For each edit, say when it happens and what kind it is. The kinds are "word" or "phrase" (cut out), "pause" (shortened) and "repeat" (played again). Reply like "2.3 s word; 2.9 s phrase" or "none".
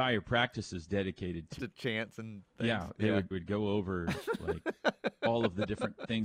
1.6 s word; 3.3 s word